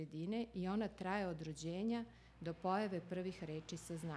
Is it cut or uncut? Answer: uncut